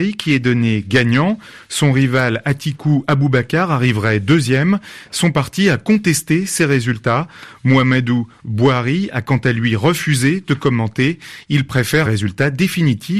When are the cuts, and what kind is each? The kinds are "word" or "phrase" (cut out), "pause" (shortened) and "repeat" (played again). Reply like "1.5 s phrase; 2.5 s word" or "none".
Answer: 12.1 s phrase